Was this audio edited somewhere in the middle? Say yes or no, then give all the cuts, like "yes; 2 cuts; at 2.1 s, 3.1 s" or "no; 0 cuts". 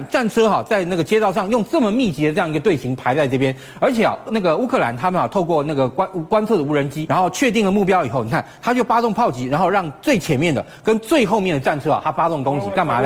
yes; 2 cuts; at 4.3 s, 7.1 s